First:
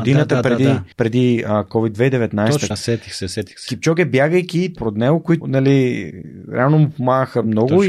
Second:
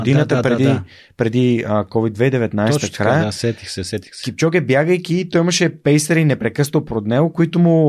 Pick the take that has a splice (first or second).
first